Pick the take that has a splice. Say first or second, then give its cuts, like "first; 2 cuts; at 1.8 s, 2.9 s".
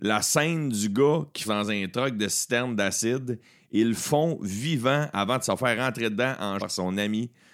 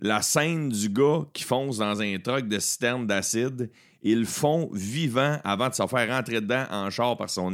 first; 2 cuts; at 1.4 s, 6.6 s